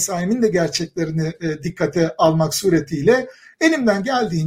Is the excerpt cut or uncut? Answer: uncut